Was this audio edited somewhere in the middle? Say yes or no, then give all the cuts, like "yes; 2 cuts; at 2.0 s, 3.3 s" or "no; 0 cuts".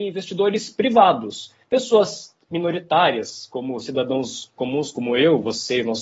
yes; 1 cut; at 1.6 s